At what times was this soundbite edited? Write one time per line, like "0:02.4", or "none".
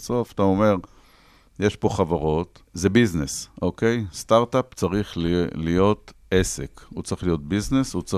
0:02.6